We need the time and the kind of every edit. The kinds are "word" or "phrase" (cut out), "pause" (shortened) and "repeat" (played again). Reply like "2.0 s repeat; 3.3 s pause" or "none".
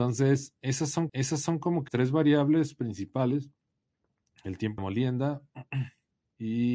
1.1 s repeat; 1.9 s word; 4.8 s phrase